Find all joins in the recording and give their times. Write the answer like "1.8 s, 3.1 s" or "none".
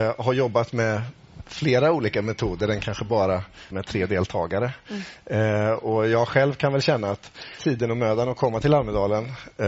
3.7 s, 7.6 s